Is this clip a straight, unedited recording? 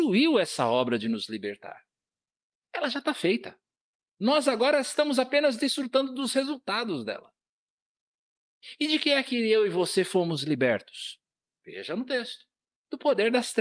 yes; 0 cuts

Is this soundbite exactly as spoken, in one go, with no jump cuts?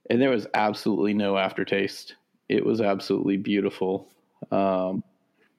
yes; 0 cuts

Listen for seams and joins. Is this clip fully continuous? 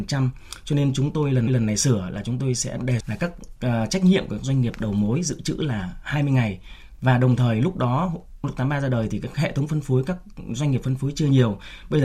no; 2 cuts; at 1.5 s, 3.0 s

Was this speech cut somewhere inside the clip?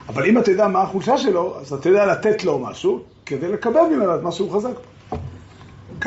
no; 0 cuts

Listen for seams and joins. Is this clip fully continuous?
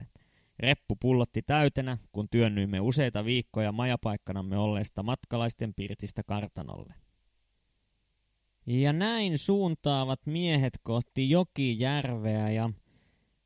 yes; 0 cuts

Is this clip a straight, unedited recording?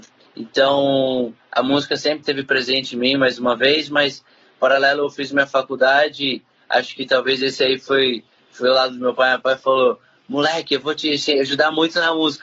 yes; 0 cuts

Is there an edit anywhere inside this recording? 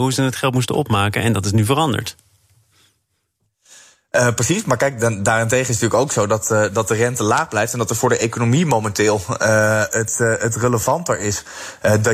no; 0 cuts

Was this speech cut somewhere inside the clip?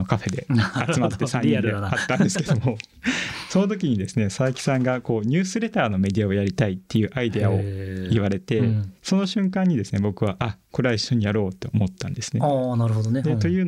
yes; 1 cut; at 9.0 s

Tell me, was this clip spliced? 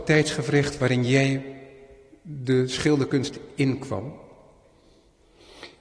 no; 0 cuts

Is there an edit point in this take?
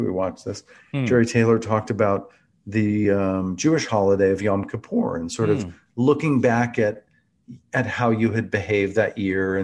no; 0 cuts

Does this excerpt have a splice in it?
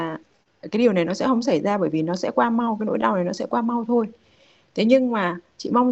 no; 0 cuts

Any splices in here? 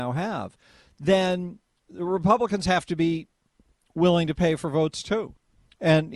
no; 0 cuts

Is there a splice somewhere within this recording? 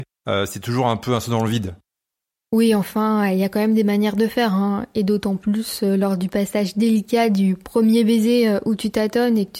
no; 0 cuts

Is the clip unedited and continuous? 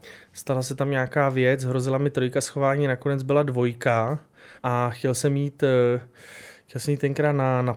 no; 1 cut; at 4.6 s

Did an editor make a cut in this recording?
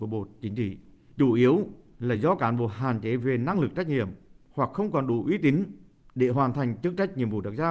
no; 0 cuts

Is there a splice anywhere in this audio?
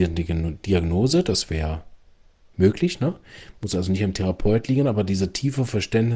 no; 0 cuts

